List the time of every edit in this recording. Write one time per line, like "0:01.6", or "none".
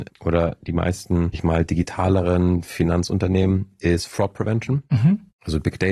0:01.3